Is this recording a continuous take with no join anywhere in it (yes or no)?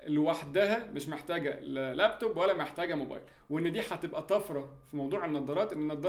yes